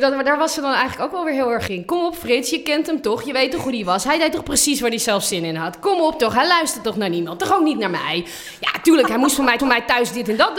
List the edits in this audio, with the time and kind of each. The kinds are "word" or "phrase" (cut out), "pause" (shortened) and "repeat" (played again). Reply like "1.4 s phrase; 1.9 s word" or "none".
1.7 s word; 9.6 s repeat